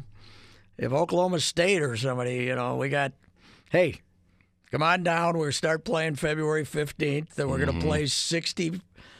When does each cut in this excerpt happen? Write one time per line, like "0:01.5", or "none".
none